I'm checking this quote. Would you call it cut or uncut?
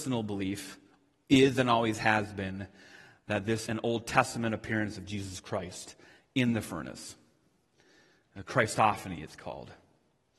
cut